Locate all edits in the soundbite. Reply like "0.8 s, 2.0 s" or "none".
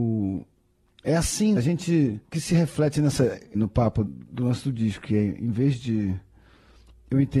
1.6 s, 2.2 s, 3.5 s, 4.1 s